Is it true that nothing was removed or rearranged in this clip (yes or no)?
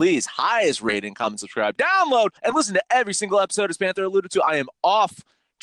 no